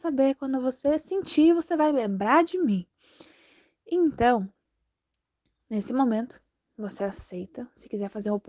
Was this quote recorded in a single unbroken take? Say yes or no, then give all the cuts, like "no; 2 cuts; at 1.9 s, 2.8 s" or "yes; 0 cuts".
yes; 0 cuts